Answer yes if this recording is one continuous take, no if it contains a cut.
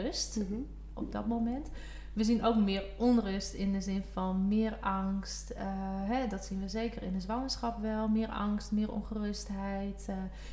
yes